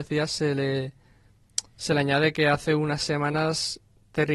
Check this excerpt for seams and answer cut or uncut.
cut